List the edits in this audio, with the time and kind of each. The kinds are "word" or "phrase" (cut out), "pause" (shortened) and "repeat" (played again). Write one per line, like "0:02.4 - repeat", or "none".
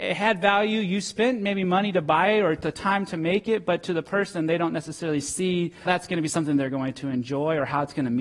0:05.8 - word